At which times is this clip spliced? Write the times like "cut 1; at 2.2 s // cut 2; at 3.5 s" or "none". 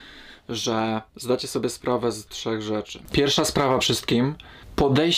cut 1; at 1.1 s // cut 2; at 2.3 s // cut 3; at 3.8 s